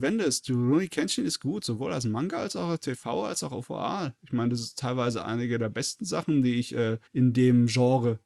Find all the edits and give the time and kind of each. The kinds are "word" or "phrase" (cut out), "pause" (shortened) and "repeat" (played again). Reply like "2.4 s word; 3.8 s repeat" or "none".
7.1 s pause